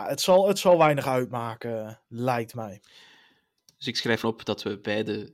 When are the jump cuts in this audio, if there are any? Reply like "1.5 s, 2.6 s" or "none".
4.2 s